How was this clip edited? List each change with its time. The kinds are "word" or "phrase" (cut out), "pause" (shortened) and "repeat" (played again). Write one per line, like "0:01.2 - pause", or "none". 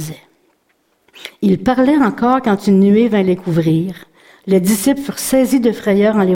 none